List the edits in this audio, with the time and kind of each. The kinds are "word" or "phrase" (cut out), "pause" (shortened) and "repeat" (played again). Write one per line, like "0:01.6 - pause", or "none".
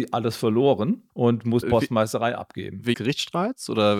0:01.1 - pause
0:01.6 - word
0:02.9 - word

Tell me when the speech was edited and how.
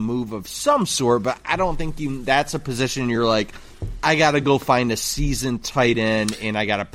none

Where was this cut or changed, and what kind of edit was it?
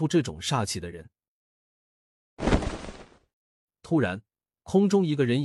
none

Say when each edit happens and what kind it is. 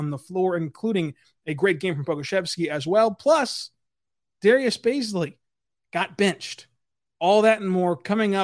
none

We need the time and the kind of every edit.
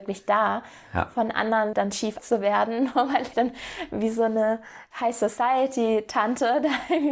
0:01.7 - word
0:02.2 - word
0:03.3 - word
0:04.9 - word

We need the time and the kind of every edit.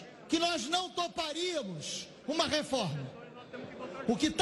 none

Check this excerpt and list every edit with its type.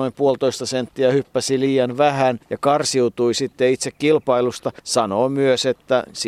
0:02.4 - pause
0:04.8 - pause

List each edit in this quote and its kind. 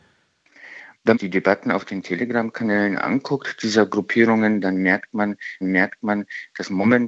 0:01.1 - phrase
0:05.6 - repeat

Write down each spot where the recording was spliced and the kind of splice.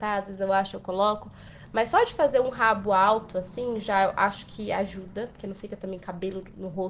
none

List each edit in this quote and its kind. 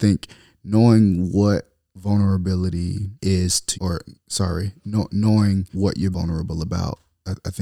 0:03.2 - pause
0:03.7 - word
0:05.7 - word
0:06.1 - word

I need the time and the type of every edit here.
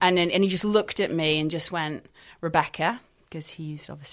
none

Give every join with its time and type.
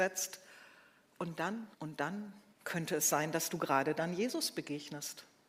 0:01.7 - pause
0:02.5 - pause

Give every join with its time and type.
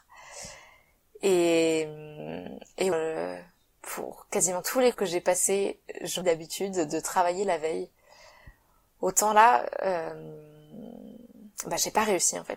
0:02.9 - word
0:04.9 - word
0:06.2 - word

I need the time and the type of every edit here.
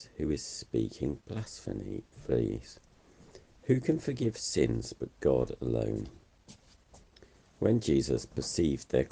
none

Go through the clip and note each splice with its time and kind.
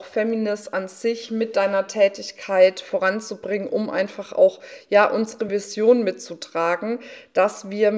none

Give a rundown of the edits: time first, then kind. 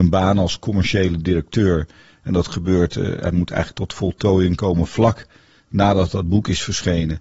none

